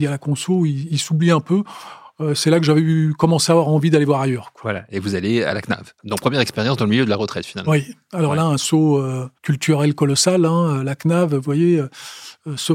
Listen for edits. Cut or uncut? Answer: cut